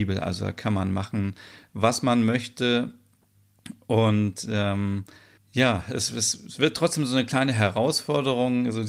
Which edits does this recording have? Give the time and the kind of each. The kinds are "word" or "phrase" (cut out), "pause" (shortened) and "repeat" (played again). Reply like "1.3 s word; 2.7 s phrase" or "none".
5.4 s pause